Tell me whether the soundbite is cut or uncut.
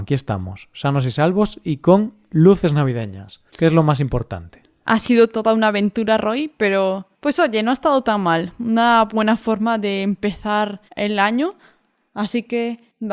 cut